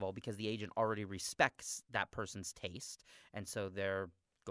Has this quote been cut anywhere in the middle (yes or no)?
no